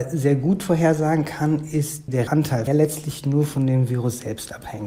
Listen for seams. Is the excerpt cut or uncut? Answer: cut